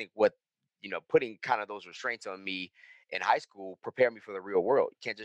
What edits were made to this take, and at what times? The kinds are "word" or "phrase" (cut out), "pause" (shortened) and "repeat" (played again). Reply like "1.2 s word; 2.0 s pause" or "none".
none